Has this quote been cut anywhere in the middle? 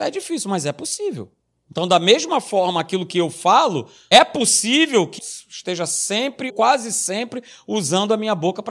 yes; 4 cuts; at 1.4 s, 4.1 s, 5.2 s, 6.5 s

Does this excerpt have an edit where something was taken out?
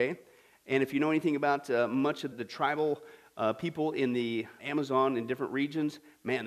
yes; 2 cuts; at 2.3 s, 4.6 s

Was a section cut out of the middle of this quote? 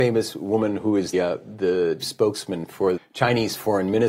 yes; 3 cuts; at 1.1 s, 2.0 s, 3.0 s

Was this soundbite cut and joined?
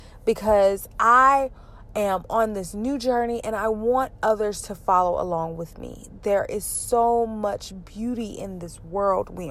no; 0 cuts

